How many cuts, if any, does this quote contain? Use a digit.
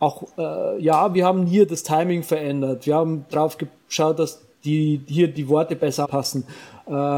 1